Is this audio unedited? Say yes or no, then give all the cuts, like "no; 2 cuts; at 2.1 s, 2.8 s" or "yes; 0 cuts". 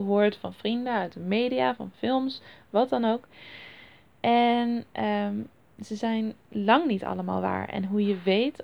yes; 0 cuts